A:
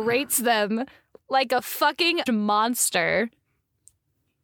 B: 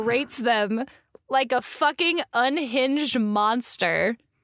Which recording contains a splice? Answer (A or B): A